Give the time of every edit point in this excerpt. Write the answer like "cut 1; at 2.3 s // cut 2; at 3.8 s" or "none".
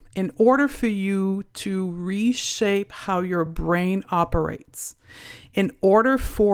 none